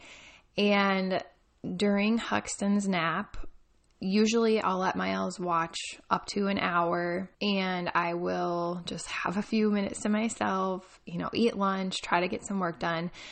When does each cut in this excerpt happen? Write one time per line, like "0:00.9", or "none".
0:03.7
0:07.3